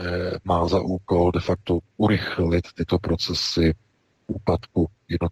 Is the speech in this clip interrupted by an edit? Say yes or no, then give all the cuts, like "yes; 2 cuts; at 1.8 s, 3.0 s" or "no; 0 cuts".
no; 0 cuts